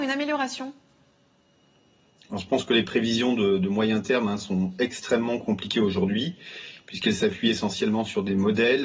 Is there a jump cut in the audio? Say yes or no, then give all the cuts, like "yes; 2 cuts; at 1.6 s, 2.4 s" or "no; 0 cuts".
no; 0 cuts